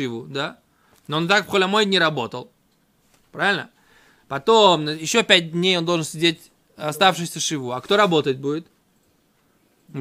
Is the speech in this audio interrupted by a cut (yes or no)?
no